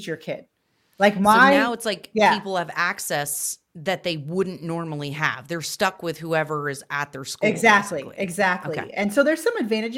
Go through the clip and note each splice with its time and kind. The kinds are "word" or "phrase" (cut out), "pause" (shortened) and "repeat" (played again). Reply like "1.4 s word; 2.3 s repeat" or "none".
none